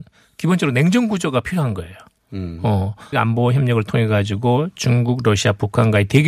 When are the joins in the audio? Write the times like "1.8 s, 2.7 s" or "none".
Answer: 3.1 s